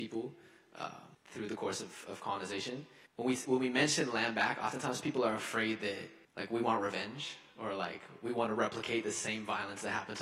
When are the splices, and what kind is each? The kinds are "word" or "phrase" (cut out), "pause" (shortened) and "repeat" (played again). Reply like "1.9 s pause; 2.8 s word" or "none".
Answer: 1.1 s pause; 3.1 s pause; 6.2 s pause

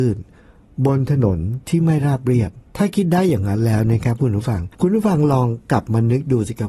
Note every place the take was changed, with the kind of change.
1.6 s pause; 2.7 s pause; 4.7 s pause

